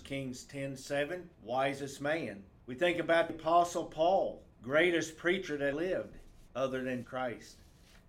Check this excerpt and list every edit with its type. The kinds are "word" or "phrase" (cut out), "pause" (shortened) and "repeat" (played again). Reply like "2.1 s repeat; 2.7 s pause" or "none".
1.3 s pause; 2.6 s pause; 3.3 s word; 4.5 s pause; 5.7 s word; 6.5 s pause; 7.0 s word